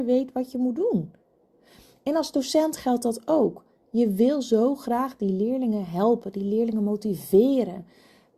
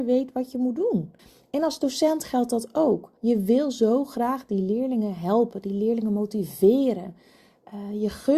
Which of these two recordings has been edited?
second; 2 cuts; at 1.2 s, 3.2 s

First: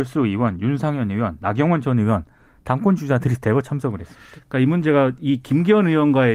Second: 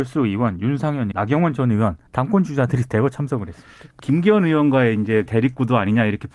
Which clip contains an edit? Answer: second; 4 cuts; at 1.1 s, 2.1 s, 4.0 s, 5.3 s

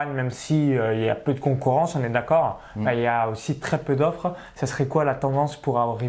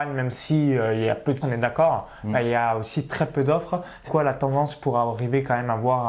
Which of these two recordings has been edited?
second; 2 cuts; at 1.4 s, 4.1 s

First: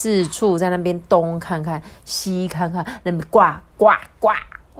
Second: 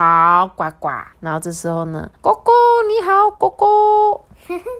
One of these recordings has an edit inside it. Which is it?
second; 2 cuts; at 1.1 s, 2.1 s

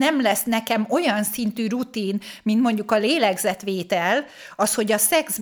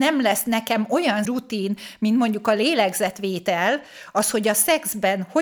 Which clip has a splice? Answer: second; 1 cut; at 1.2 s

